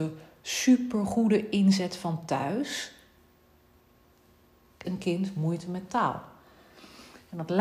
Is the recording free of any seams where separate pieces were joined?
no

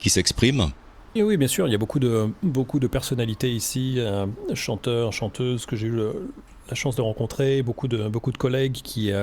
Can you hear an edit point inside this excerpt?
yes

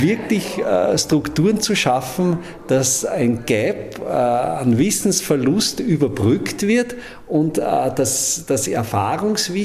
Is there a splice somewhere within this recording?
no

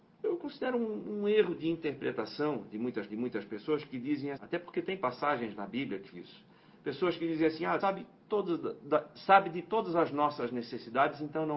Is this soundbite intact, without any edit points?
no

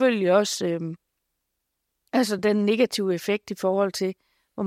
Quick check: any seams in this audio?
no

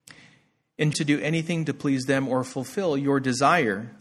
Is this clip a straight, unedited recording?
no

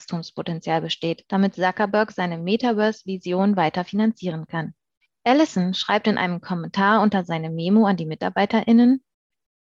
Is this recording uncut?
yes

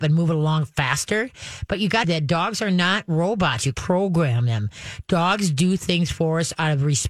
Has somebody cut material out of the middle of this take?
yes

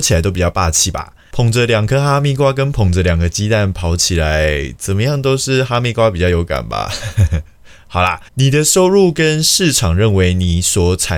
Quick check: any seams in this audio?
yes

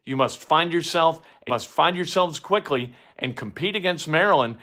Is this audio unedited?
no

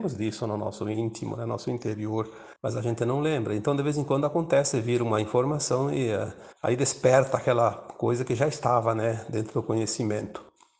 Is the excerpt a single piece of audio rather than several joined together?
no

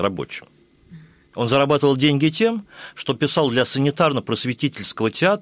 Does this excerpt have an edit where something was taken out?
no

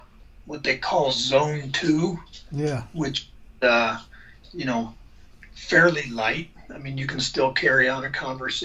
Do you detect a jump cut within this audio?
no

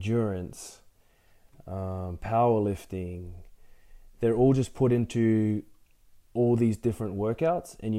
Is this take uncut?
yes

